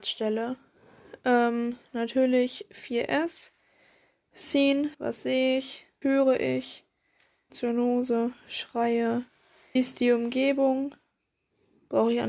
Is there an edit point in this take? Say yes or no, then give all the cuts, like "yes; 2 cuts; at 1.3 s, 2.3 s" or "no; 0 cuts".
yes; 4 cuts; at 4.9 s, 6.0 s, 7.5 s, 9.8 s